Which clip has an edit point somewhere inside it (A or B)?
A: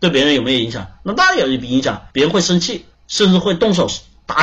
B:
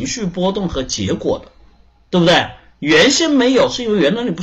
A